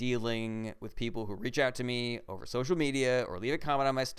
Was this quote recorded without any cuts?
yes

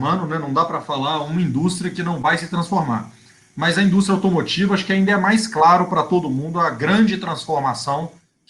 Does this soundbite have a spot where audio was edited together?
no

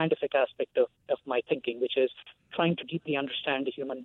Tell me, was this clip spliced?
no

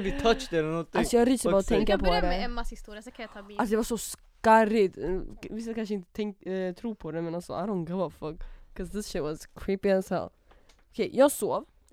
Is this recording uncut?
yes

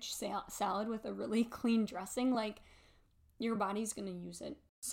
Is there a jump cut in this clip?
no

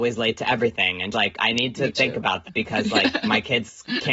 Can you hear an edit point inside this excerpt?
yes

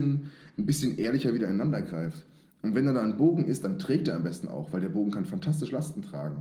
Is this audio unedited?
yes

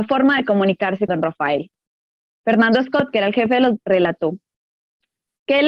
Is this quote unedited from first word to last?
no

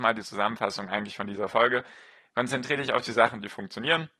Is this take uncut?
yes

